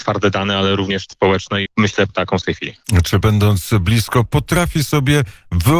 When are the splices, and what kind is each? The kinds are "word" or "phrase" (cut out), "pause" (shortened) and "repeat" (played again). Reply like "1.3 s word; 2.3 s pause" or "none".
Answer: 1.1 s word; 1.7 s word; 2.1 s word; 2.4 s word; 3.2 s word; 4.3 s word